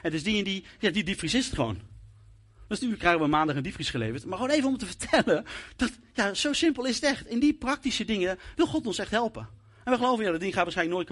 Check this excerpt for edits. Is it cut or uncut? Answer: uncut